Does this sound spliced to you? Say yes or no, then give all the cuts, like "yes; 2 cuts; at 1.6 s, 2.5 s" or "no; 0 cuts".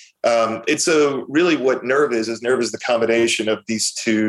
no; 0 cuts